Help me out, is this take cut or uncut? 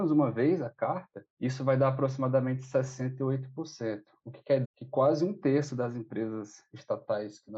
cut